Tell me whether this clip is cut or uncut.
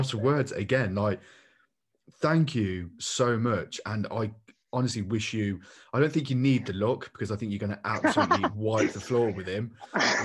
uncut